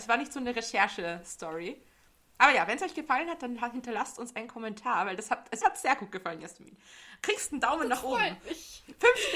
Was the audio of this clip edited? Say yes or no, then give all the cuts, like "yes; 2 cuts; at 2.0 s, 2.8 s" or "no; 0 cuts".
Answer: yes; 1 cut; at 5.6 s